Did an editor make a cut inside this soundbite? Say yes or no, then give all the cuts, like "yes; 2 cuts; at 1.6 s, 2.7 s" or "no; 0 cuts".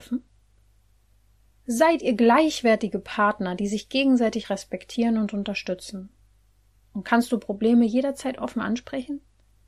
no; 0 cuts